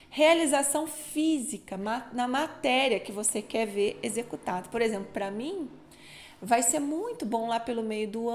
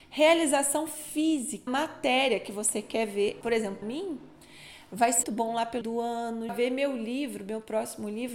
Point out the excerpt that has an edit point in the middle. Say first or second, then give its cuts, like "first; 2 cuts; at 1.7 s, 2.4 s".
second; 6 cuts; at 1.7 s, 3.4 s, 3.8 s, 5.2 s, 5.8 s, 6.5 s